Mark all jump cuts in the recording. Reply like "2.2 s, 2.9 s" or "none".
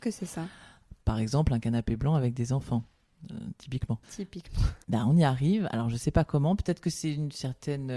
4.0 s

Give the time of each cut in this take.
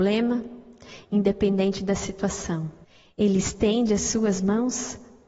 2.8 s

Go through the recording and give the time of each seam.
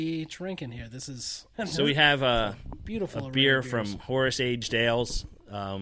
1.5 s

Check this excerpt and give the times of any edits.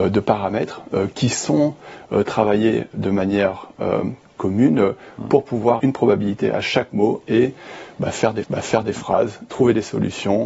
5.8 s, 8.4 s

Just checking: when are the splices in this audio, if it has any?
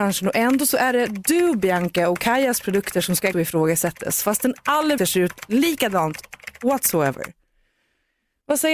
3.3 s, 5.0 s

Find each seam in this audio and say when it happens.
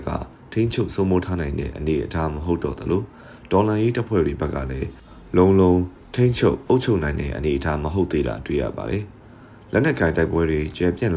9.2 s

